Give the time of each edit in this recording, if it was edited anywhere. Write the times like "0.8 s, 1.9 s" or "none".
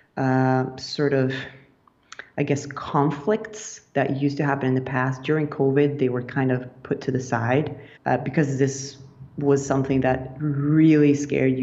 8.0 s